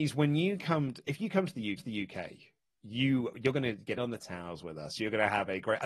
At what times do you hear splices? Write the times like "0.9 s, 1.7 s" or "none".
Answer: 1.8 s, 4.0 s

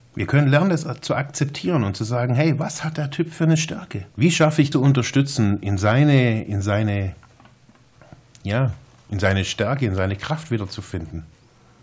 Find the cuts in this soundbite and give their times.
4.1 s, 4.7 s

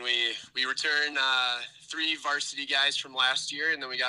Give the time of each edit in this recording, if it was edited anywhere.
none

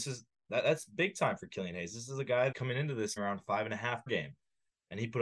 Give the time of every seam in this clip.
2.5 s, 3.2 s, 4.1 s

